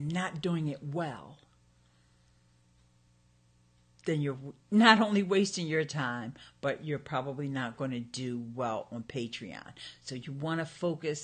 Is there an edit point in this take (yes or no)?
no